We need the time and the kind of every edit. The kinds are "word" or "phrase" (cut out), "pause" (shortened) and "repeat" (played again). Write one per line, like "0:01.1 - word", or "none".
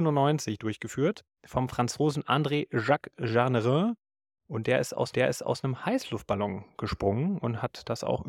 0:05.1 - repeat